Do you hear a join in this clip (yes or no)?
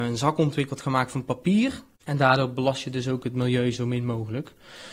no